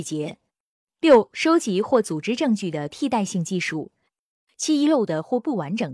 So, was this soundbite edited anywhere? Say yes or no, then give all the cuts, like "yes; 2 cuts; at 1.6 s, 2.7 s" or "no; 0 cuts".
no; 0 cuts